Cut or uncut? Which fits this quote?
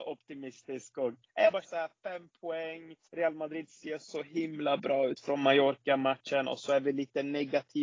cut